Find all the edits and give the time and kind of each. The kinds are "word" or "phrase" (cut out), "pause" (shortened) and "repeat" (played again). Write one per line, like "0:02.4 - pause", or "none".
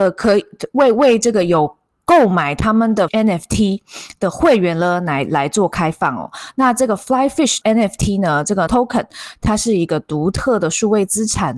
0:03.1 - word
0:07.6 - word
0:08.7 - word